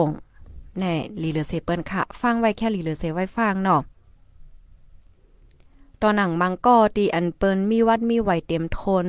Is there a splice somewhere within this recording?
no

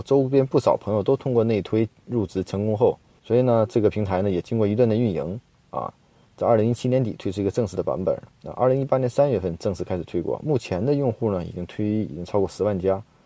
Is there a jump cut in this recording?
yes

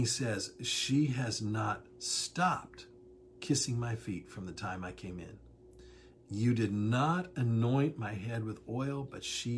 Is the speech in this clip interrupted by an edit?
no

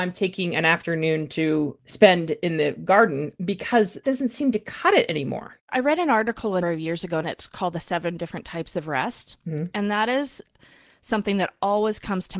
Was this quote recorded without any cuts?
no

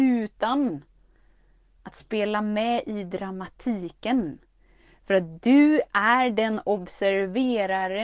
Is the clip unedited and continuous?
yes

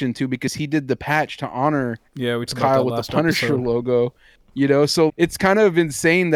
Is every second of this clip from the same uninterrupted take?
no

